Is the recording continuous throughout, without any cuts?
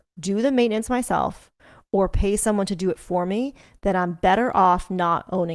yes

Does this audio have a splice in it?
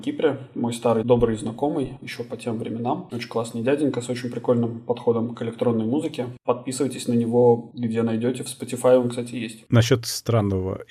no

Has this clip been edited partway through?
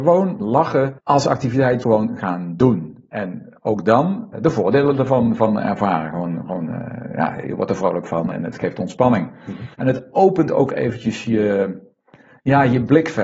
yes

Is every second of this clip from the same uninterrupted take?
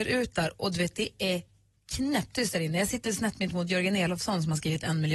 yes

